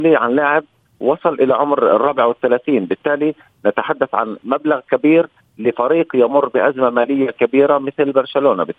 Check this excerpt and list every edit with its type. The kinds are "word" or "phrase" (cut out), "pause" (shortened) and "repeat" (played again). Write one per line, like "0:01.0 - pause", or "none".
none